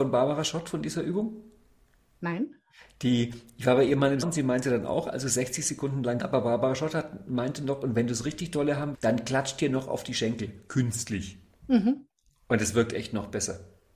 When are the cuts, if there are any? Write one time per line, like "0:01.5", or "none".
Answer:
0:04.2
0:06.2
0:08.9